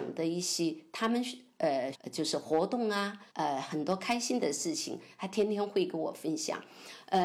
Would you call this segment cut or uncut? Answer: cut